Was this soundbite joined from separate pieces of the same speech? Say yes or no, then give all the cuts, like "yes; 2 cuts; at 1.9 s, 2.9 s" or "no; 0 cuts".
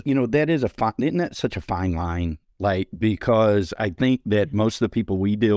no; 0 cuts